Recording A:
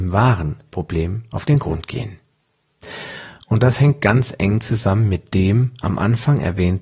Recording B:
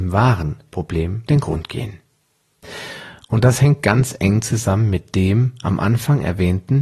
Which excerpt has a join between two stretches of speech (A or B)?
B